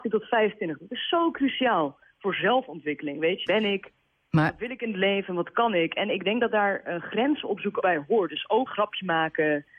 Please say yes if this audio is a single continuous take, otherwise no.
no